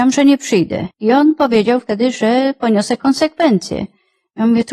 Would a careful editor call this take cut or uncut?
cut